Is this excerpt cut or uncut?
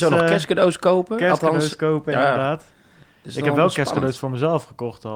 uncut